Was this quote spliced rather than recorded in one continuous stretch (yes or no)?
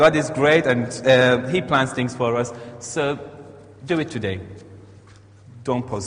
yes